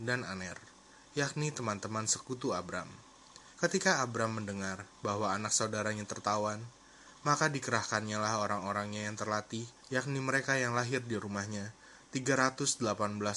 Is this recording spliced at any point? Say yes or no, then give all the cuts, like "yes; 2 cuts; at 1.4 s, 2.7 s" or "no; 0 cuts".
yes; 2 cuts; at 3.5 s, 9.8 s